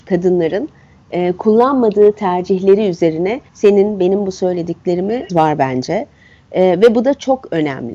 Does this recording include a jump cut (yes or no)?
yes